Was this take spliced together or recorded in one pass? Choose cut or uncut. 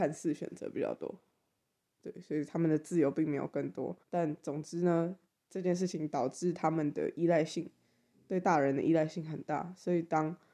cut